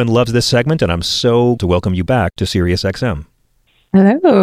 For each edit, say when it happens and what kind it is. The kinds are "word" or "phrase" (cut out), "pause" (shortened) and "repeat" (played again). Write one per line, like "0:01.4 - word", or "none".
0:01.6 - word
0:02.1 - word